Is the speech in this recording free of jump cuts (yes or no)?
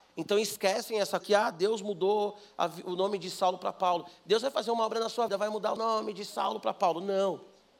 no